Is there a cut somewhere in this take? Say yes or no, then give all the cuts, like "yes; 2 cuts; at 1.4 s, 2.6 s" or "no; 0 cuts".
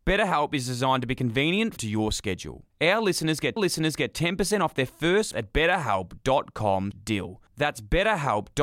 yes; 4 cuts; at 1.8 s, 3.6 s, 5.3 s, 6.9 s